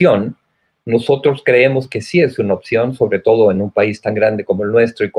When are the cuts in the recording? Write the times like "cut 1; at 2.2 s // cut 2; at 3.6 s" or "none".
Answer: none